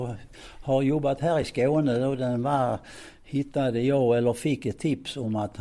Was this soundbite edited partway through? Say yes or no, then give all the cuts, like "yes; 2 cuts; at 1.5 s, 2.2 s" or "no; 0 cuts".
no; 0 cuts